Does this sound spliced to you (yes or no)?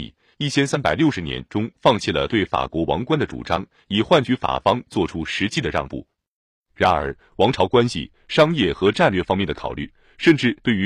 no